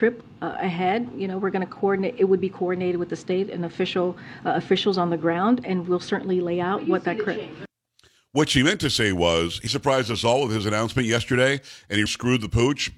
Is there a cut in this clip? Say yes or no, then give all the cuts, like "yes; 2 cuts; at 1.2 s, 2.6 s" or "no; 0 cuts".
yes; 2 cuts; at 9.7 s, 12.1 s